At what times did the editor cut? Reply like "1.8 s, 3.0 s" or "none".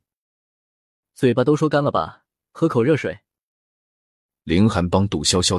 none